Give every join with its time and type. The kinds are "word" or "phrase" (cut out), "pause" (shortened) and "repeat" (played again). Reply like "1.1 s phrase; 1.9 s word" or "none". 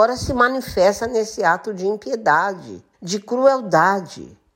2.9 s pause